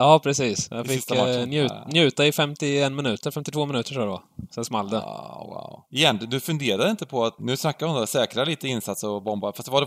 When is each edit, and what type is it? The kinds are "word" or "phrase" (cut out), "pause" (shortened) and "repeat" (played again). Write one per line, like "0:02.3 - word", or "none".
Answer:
0:05.9 - pause
0:07.4 - word